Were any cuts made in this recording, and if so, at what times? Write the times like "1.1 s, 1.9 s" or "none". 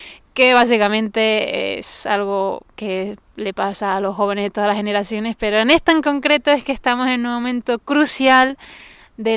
2.7 s